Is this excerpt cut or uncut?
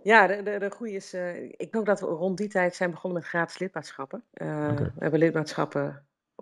cut